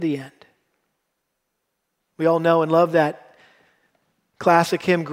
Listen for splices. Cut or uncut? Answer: cut